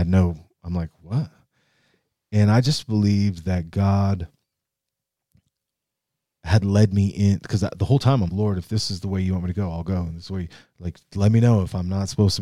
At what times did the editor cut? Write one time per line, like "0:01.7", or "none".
0:08.3